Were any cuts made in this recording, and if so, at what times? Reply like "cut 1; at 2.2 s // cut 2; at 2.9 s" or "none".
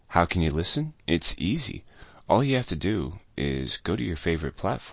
cut 1; at 1.0 s